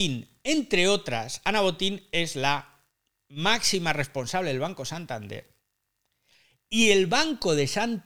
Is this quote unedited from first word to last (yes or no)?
yes